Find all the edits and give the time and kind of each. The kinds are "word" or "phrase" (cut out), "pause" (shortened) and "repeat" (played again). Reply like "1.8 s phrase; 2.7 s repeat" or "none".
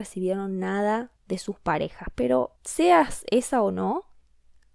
1.2 s pause; 2.6 s pause